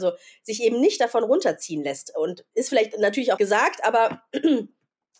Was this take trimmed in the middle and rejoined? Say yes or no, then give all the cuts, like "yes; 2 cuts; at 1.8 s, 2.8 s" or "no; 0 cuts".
yes; 1 cut; at 3.4 s